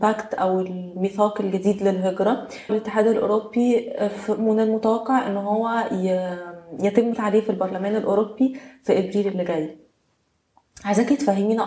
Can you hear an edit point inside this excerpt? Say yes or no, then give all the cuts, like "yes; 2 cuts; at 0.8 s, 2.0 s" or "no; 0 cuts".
yes; 2 cuts; at 2.7 s, 7.1 s